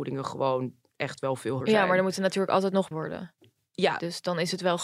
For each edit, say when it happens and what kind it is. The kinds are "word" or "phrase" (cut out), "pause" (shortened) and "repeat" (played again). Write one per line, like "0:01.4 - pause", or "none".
0:01.6 - word
0:02.9 - word